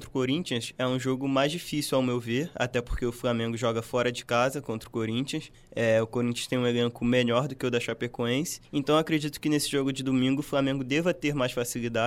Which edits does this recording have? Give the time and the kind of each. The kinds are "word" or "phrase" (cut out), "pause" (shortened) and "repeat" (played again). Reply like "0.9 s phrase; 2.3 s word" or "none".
8.6 s pause